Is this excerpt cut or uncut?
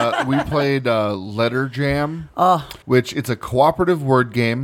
cut